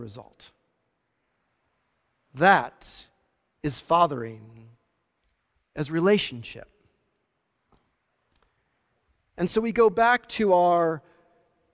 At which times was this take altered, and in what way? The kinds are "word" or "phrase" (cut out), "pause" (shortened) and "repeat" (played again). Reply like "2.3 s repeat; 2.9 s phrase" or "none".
none